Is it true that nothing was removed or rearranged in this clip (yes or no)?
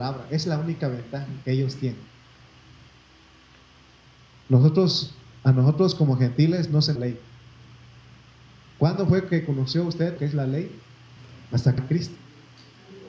no